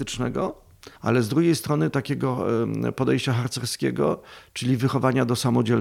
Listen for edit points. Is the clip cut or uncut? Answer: cut